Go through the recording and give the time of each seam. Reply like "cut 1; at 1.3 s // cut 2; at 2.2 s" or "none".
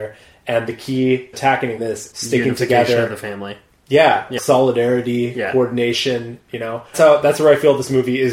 cut 1; at 1.3 s // cut 2; at 1.8 s // cut 3; at 2.1 s // cut 4; at 4.4 s // cut 5; at 6.9 s